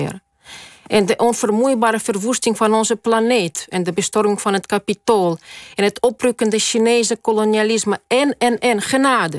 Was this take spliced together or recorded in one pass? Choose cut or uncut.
uncut